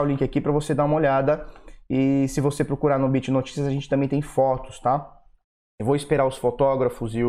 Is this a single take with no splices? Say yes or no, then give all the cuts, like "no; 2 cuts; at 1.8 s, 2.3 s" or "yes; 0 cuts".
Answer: yes; 0 cuts